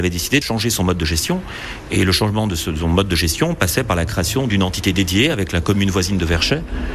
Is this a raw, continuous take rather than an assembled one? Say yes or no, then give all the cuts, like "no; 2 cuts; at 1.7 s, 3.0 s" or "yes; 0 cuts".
yes; 0 cuts